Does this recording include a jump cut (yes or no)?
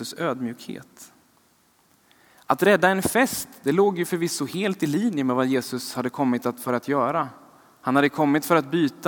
no